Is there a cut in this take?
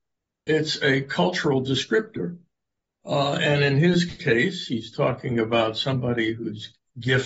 yes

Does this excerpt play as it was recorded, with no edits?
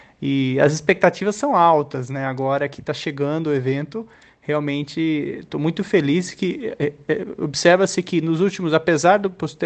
yes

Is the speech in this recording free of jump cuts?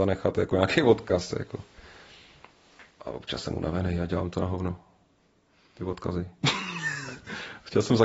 yes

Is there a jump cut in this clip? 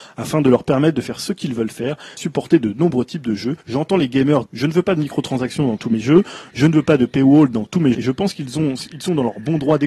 yes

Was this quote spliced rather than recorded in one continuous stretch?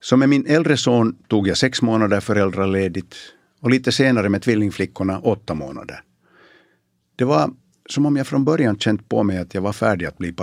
no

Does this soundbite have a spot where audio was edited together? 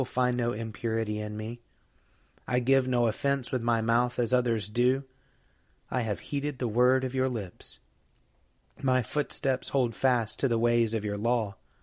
no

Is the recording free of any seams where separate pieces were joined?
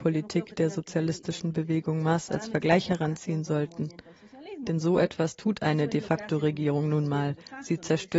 yes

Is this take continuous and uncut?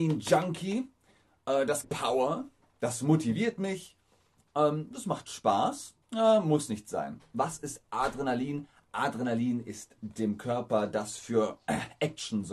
no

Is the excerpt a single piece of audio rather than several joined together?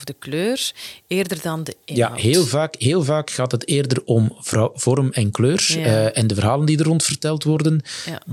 yes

